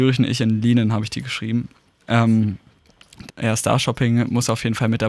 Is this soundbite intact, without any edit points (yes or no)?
no